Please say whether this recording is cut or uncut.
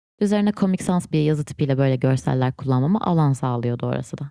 cut